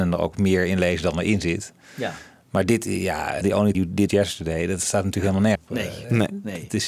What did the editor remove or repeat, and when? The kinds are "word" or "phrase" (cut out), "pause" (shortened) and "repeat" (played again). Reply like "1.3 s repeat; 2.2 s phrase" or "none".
3.4 s word; 3.7 s word; 4.1 s word; 5.5 s word